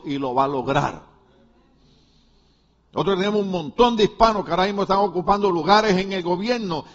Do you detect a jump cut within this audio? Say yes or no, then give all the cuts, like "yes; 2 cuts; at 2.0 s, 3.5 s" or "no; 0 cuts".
no; 0 cuts